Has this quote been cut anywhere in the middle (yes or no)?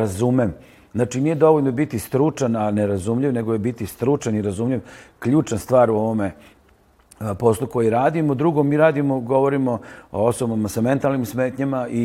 no